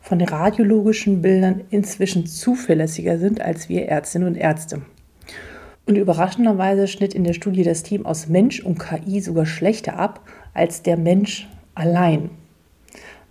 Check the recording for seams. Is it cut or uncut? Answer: cut